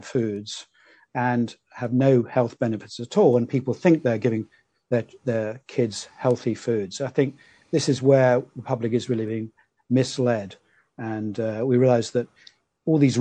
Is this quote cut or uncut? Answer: uncut